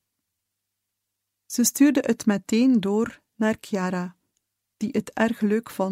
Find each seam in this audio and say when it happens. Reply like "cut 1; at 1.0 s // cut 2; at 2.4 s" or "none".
none